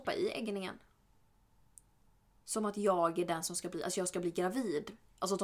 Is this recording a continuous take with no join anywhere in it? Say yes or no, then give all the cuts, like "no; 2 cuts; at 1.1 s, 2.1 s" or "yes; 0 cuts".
yes; 0 cuts